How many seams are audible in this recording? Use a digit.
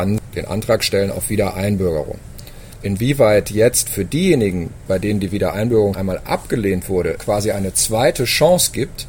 2